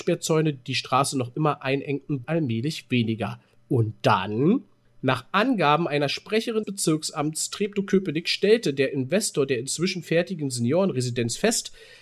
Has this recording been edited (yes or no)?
yes